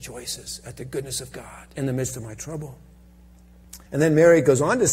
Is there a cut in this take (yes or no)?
yes